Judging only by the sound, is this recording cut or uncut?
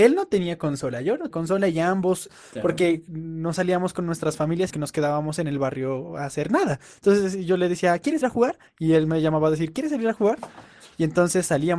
cut